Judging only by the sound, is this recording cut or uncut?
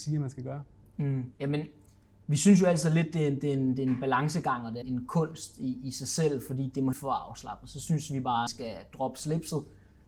cut